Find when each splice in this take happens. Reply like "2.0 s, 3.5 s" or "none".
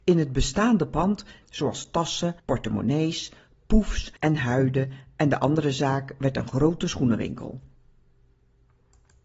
1.4 s, 2.4 s, 4.2 s